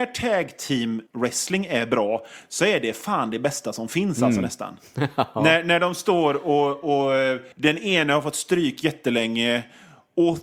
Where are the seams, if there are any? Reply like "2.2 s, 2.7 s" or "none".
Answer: 1.1 s, 7.5 s

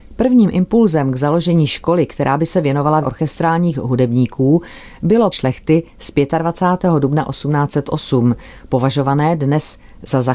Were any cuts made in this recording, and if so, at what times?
3.0 s, 5.3 s

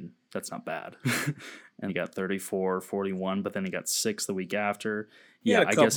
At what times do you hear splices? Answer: 1.9 s

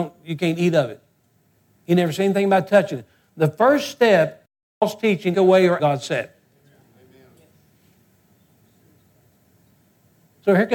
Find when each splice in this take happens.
5.3 s, 5.8 s

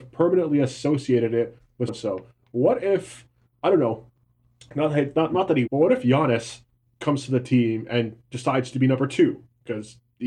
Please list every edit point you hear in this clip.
1.9 s, 5.7 s

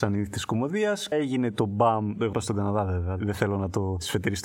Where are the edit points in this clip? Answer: 1.1 s, 2.3 s

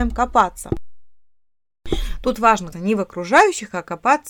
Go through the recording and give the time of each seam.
2.7 s

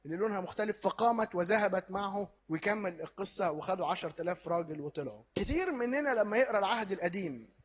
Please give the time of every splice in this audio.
2.4 s, 5.3 s

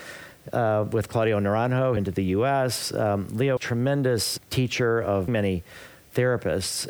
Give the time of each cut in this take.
2.0 s, 3.6 s, 4.4 s, 5.3 s

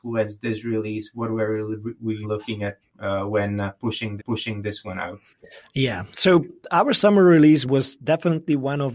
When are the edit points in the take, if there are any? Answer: 2.2 s, 4.2 s

